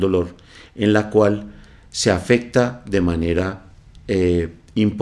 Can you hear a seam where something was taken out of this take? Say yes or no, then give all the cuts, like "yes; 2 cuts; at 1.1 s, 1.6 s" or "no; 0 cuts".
no; 0 cuts